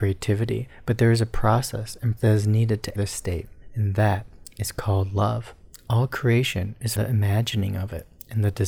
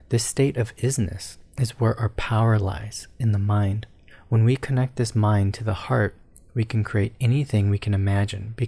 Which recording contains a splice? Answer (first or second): first